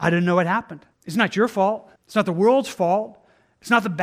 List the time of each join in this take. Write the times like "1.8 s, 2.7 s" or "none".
0.9 s, 2.0 s